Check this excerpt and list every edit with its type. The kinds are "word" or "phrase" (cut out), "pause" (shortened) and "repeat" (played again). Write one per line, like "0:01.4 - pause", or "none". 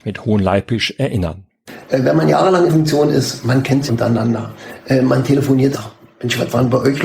0:02.7 - word
0:03.9 - word
0:05.7 - phrase